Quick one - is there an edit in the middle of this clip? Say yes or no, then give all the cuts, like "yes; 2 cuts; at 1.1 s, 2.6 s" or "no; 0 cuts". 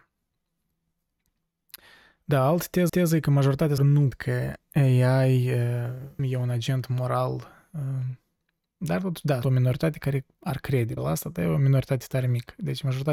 yes; 7 cuts; at 2.9 s, 3.8 s, 4.1 s, 6.2 s, 9.4 s, 10.3 s, 11.0 s